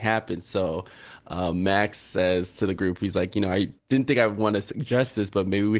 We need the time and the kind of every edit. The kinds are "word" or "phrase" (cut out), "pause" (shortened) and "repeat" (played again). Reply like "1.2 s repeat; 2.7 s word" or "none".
3.8 s pause